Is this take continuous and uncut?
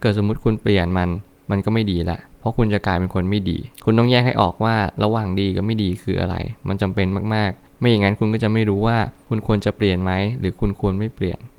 yes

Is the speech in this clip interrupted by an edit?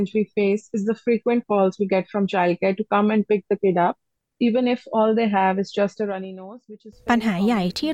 no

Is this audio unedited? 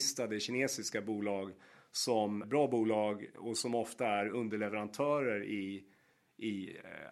no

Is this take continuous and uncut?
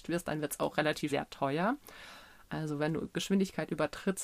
no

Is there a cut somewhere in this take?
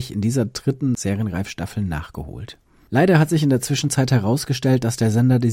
no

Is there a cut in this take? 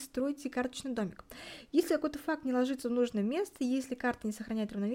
no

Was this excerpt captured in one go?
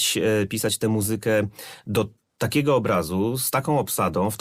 no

